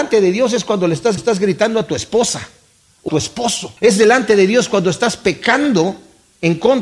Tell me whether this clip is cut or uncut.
cut